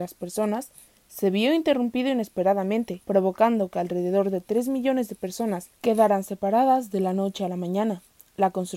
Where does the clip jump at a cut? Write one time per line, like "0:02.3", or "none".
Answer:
0:03.0
0:05.7